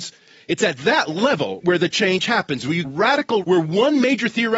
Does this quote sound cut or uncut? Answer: cut